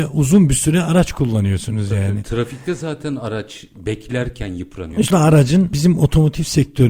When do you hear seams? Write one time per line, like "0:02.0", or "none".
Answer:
0:05.1